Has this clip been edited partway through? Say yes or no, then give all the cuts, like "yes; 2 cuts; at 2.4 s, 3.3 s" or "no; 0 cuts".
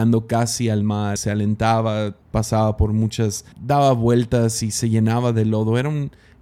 yes; 3 cuts; at 1.2 s, 2.2 s, 3.5 s